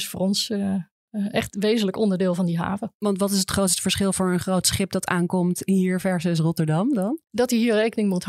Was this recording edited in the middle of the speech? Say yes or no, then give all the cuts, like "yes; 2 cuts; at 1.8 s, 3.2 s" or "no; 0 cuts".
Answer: yes; 1 cut; at 7.3 s